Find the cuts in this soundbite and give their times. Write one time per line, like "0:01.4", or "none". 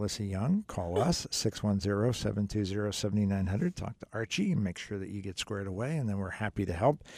none

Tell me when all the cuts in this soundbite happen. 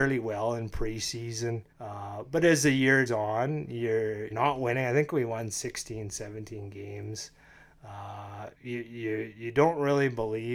0:01.7
0:03.1
0:04.3
0:08.5

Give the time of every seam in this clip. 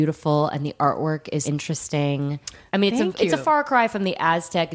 0:01.4

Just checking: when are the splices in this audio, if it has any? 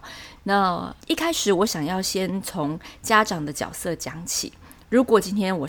0:01.0

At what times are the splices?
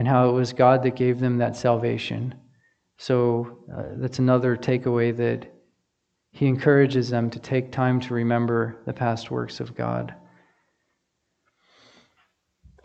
none

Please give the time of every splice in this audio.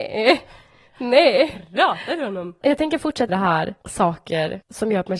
0:03.3

